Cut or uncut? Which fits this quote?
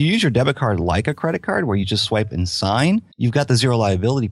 cut